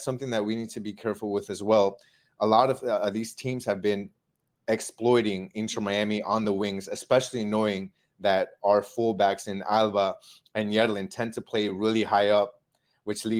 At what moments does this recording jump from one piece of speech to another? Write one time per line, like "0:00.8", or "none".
none

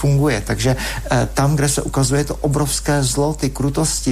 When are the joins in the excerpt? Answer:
none

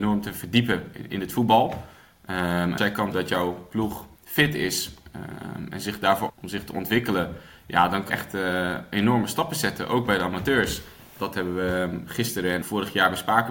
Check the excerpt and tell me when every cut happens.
0:02.8
0:03.1
0:04.2
0:06.3
0:08.1
0:11.2
0:12.6

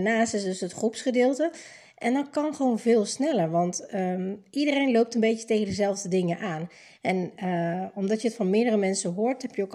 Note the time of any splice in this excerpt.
none

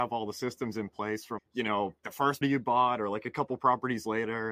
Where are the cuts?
0:01.4
0:02.0
0:02.4

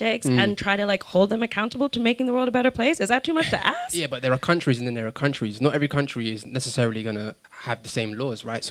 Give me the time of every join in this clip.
0:07.4

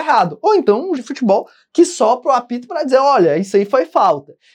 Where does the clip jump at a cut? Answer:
0:01.0

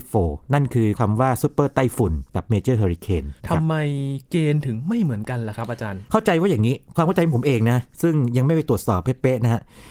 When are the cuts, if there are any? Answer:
0:03.4

